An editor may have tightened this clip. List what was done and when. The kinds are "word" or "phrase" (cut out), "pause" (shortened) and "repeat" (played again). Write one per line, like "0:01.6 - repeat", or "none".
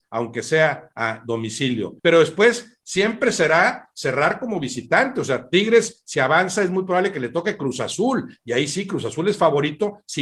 0:02.0 - pause